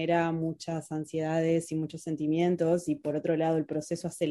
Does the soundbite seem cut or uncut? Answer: uncut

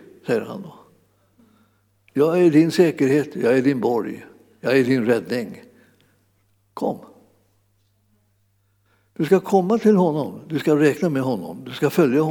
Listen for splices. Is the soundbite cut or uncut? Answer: uncut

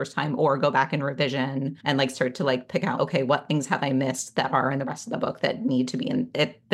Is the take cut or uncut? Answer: cut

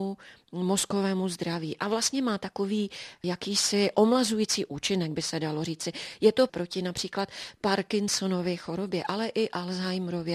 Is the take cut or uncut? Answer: cut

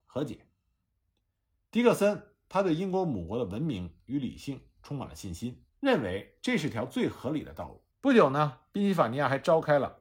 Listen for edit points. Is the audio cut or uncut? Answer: cut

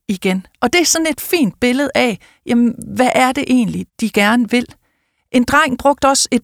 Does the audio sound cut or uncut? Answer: uncut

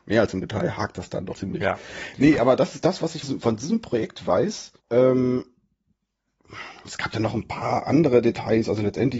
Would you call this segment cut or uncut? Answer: cut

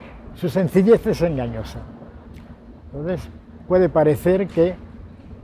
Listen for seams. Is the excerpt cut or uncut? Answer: uncut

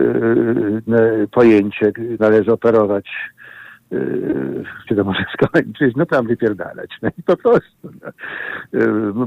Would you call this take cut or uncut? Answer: cut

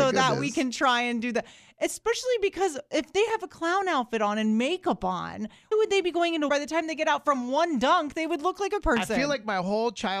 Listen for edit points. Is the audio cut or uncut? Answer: cut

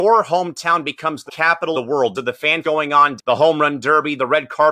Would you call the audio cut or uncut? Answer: cut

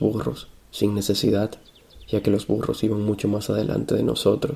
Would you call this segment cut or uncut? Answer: uncut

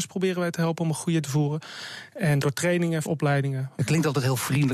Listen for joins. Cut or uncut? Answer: cut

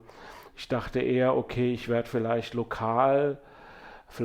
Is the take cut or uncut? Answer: uncut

